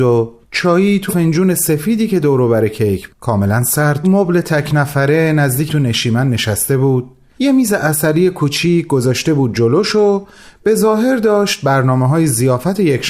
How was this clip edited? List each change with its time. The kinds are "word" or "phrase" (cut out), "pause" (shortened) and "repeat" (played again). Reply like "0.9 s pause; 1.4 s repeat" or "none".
1.1 s phrase; 3.1 s word; 4.0 s phrase; 5.7 s word